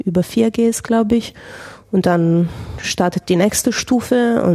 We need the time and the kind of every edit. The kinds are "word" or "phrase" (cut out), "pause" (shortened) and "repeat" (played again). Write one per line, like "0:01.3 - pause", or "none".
none